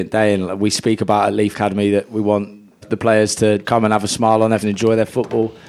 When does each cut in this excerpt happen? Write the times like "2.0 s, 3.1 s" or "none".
1.5 s, 2.8 s, 3.6 s, 4.6 s